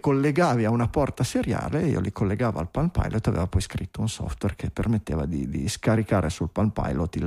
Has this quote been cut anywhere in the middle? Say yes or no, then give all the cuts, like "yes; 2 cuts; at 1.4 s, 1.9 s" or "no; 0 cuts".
no; 0 cuts